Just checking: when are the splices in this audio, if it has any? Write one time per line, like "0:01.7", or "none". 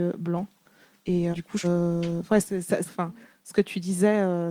0:01.3
0:01.6
0:02.9